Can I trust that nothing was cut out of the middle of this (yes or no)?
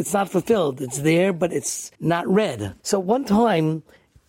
no